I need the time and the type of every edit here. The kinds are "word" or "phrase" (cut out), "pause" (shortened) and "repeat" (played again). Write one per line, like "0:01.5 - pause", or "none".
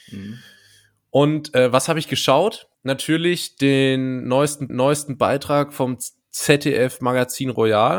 0:02.7 - pause
0:04.7 - repeat